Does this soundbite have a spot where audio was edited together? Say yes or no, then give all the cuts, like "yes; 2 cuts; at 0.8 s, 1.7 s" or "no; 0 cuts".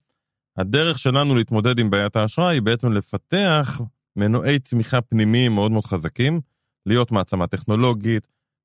no; 0 cuts